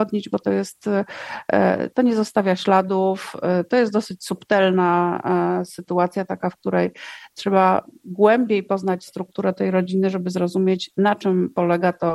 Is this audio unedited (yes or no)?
yes